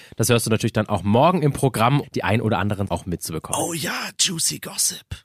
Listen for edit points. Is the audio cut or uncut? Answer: cut